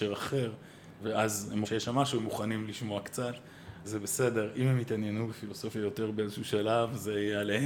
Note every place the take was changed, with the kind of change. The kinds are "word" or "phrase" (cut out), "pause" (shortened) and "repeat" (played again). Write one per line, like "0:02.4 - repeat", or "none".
0:01.0 - word
0:01.6 - word
0:03.8 - word